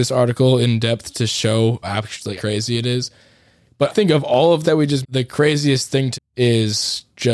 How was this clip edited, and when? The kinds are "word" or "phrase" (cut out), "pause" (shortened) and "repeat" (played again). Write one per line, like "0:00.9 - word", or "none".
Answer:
0:01.1 - word
0:01.8 - word
0:02.4 - word
0:03.9 - word
0:04.6 - word
0:05.0 - word
0:06.1 - word

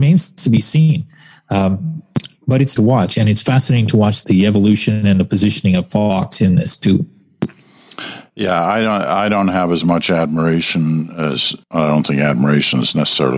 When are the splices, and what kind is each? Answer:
0:02.8 - word
0:04.2 - word
0:11.6 - pause

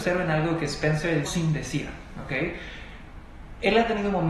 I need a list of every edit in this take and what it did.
0:01.2 - word

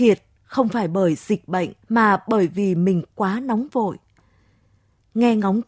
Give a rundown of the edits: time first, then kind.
0:01.8 - pause

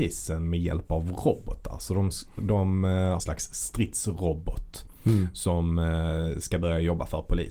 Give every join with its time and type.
0:03.2 - phrase

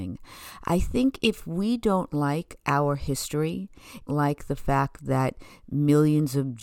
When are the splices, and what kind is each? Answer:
0:04.1 - phrase

